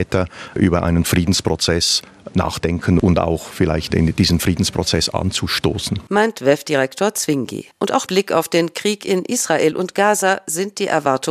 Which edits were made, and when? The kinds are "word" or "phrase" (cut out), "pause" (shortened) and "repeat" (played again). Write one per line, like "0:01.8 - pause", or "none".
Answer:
0:07.7 - pause
0:08.1 - word

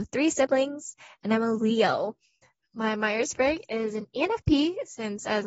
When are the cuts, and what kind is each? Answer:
none

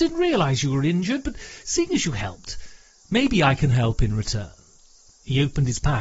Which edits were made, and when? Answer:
none

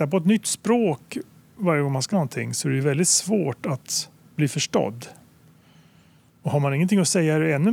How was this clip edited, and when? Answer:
0:02.1 - word

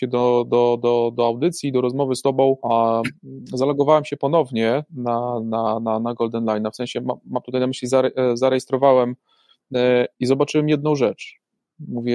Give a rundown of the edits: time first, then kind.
0:02.6 - pause
0:10.1 - pause

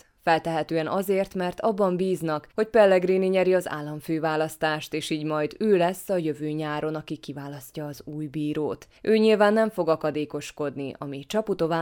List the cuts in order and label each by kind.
0:02.5 - pause
0:09.0 - pause

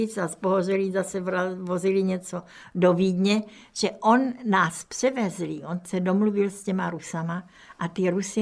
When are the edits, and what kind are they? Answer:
none

